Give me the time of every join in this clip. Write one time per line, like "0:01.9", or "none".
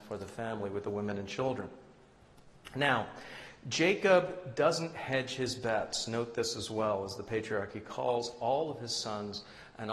none